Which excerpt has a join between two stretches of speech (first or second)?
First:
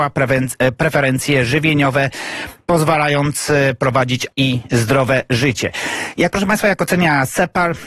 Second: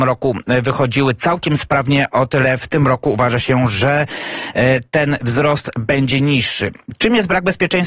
first